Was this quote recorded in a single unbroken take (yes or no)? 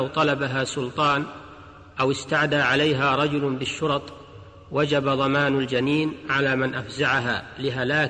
yes